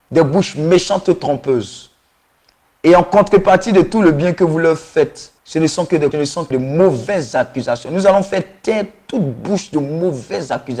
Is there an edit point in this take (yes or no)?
yes